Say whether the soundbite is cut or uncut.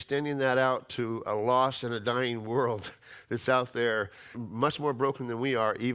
cut